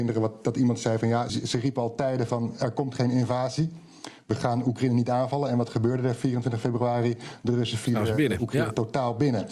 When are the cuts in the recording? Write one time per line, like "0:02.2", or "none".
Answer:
0:01.3